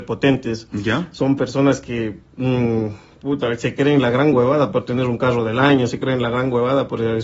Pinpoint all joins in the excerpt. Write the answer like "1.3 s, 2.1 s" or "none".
none